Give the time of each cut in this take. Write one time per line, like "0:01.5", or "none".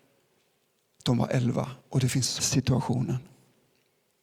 0:01.8
0:02.4